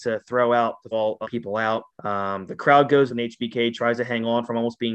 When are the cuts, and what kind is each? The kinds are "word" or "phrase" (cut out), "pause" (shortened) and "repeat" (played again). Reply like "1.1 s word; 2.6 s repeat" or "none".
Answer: 0.9 s word; 1.2 s word; 1.9 s pause; 3.1 s word